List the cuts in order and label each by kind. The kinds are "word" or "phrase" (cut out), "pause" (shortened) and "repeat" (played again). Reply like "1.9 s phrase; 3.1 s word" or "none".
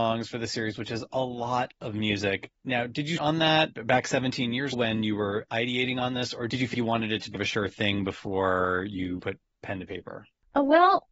3.2 s word; 3.7 s pause; 4.7 s word; 6.7 s word; 7.3 s word; 9.2 s word